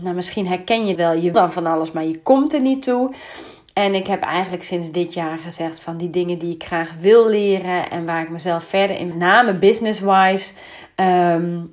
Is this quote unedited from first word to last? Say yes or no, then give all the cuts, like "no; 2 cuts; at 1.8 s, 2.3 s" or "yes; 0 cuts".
no; 3 cuts; at 1.0 s, 1.3 s, 9.1 s